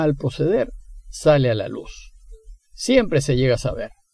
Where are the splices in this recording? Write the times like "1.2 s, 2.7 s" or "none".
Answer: none